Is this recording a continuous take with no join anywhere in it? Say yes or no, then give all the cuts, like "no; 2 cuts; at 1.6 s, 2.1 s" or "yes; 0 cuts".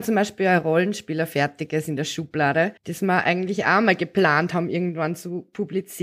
no; 1 cut; at 2.8 s